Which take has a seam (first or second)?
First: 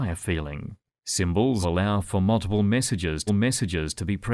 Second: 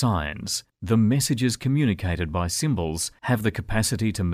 first